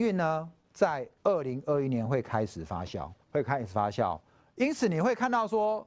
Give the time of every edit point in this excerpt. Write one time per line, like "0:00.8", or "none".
0:01.2
0:03.2